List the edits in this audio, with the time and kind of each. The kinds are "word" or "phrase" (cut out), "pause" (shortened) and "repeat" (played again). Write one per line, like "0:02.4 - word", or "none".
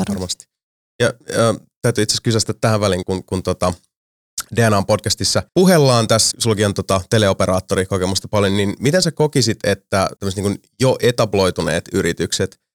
0:03.0 - word
0:05.5 - pause
0:06.3 - phrase
0:08.8 - word
0:10.2 - pause